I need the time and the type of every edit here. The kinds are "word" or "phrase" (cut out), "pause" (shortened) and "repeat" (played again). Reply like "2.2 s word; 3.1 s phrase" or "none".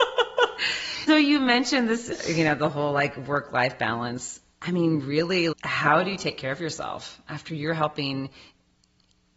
1.1 s word; 5.5 s word